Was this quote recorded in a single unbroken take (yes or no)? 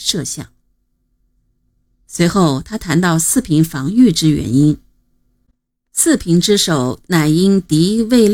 yes